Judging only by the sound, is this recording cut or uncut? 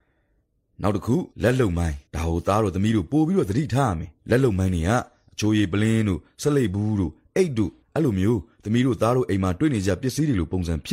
cut